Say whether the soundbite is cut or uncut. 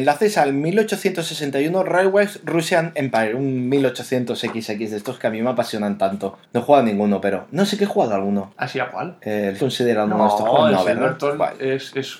cut